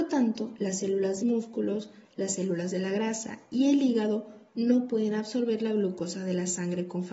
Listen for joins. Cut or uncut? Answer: cut